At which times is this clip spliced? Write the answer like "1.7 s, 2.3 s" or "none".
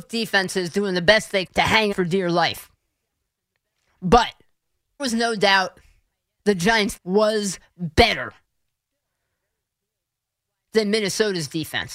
1.5 s, 1.9 s, 5.0 s, 7.0 s